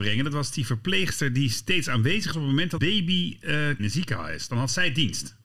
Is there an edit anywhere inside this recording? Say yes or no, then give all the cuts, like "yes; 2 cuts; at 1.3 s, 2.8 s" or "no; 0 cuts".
yes; 3 cuts; at 2.3 s, 2.8 s, 3.8 s